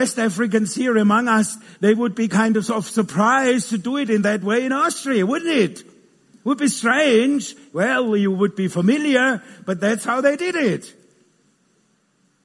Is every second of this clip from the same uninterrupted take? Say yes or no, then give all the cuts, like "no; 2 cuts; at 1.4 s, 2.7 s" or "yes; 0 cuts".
yes; 0 cuts